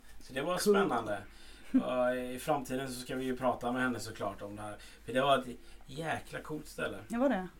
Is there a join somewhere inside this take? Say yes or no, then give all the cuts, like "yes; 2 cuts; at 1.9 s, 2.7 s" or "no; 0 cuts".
no; 0 cuts